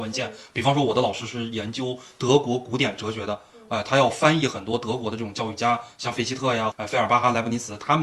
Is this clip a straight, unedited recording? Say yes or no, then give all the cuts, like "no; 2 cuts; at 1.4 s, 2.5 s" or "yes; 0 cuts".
no; 1 cut; at 6.7 s